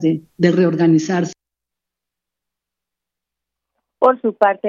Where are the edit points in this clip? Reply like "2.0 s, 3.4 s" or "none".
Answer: none